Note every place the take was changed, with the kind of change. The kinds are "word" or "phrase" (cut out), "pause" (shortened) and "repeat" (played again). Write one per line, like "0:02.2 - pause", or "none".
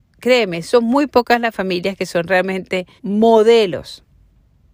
0:03.0 - pause